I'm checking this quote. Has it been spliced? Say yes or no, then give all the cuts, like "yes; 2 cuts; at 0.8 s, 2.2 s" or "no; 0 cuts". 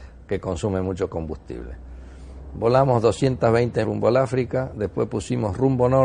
yes; 1 cut; at 3.8 s